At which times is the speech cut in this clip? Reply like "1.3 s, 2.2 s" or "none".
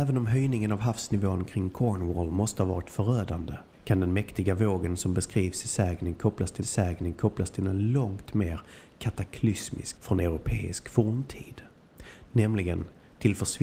3.7 s, 6.6 s, 10.0 s